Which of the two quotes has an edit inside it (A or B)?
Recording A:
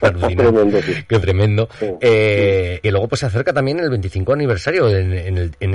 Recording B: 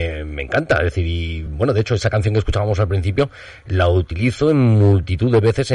A